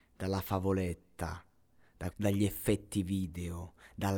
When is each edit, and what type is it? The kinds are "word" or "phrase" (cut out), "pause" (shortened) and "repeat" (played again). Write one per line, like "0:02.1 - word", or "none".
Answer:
0:02.1 - phrase